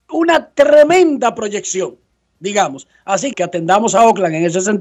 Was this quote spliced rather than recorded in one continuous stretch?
yes; 1 cut; at 3.3 s

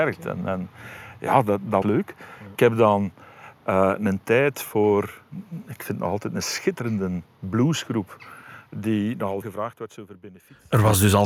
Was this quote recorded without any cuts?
no; 2 cuts; at 1.8 s, 9.4 s

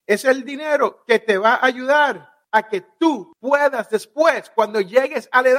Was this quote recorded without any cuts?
yes; 0 cuts

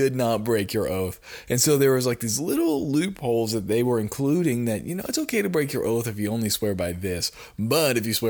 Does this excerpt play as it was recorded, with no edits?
yes; 0 cuts

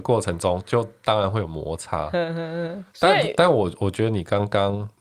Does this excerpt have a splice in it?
yes; 1 cut; at 2.9 s

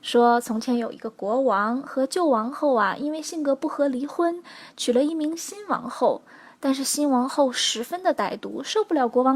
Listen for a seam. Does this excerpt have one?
no; 0 cuts

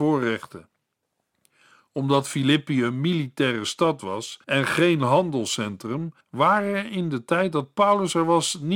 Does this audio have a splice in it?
yes; 2 cuts; at 4.4 s, 6.2 s

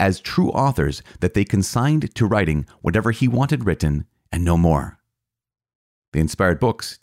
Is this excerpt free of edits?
yes; 0 cuts

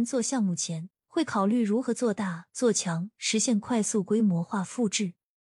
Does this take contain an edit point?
yes; 1 cut; at 1.0 s

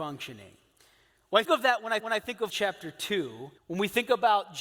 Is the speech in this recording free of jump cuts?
no; 4 cuts; at 1.4 s, 2.0 s, 2.5 s, 3.6 s

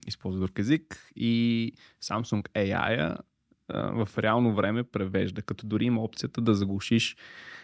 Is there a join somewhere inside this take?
no; 0 cuts

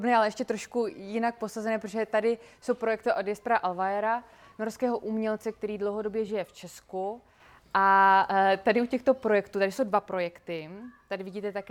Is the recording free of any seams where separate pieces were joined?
yes; 0 cuts

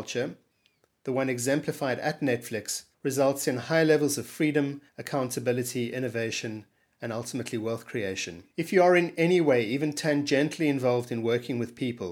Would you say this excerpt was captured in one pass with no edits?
no; 3 cuts; at 2.9 s, 4.9 s, 8.5 s

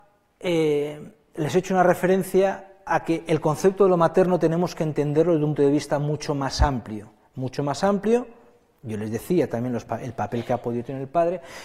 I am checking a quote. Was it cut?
yes; 1 cut; at 5.6 s

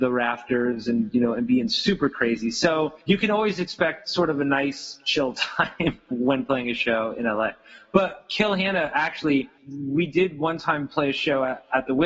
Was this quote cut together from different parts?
yes; 2 cuts; at 3.0 s, 9.6 s

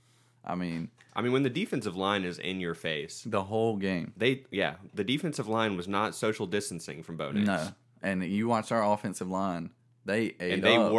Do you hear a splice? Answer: no; 0 cuts

